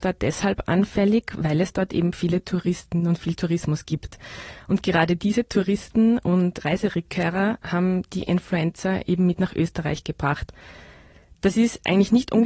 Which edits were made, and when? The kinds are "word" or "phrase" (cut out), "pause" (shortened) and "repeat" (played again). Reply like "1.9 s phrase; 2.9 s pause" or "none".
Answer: none